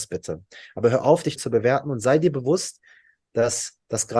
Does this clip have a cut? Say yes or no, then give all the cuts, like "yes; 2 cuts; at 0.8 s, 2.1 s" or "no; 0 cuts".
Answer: yes; 1 cut; at 1.4 s